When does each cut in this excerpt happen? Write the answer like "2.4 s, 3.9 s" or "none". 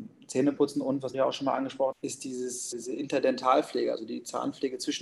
1.1 s, 1.9 s, 2.7 s